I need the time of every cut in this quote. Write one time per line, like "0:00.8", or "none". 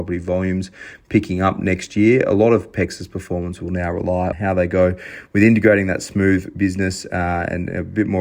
0:04.3

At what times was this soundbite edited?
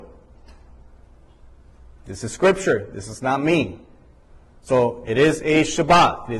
none

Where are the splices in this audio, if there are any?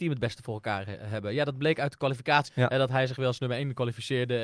0:02.5

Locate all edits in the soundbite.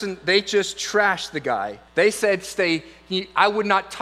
0:01.9

